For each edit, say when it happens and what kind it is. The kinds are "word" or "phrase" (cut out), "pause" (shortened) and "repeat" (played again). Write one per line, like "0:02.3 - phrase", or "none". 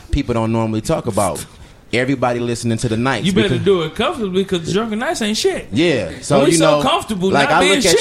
none